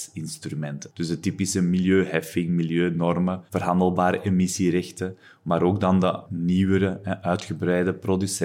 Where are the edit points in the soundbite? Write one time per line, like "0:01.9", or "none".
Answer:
0:03.5